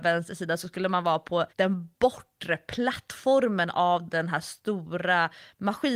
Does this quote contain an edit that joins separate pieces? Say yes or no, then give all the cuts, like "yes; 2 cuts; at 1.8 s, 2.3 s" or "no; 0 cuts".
yes; 1 cut; at 1.5 s